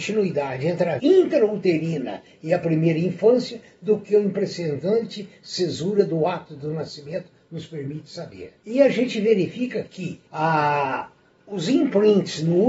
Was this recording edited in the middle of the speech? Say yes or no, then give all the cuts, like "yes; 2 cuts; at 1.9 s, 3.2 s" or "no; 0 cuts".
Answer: yes; 3 cuts; at 1.0 s, 8.6 s, 10.3 s